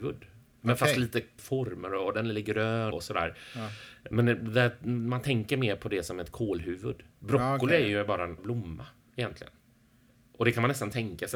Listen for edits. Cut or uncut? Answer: cut